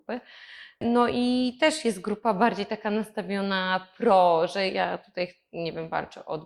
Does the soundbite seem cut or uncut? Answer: uncut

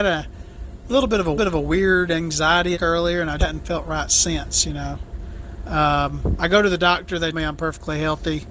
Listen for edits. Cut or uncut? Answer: cut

